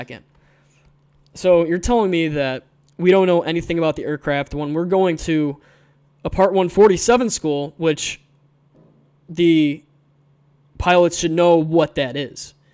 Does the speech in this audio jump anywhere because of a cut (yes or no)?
no